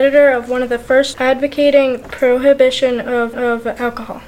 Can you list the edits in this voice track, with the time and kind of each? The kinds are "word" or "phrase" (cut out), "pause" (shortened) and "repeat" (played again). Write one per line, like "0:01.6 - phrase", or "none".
0:01.1 - word
0:02.0 - word
0:03.3 - repeat